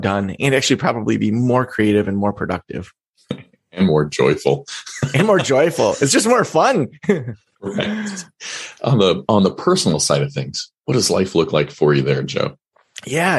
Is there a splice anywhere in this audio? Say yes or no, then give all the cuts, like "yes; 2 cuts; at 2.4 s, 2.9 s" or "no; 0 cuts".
no; 0 cuts